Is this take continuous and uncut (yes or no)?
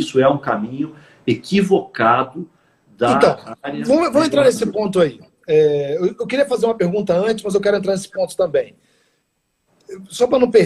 yes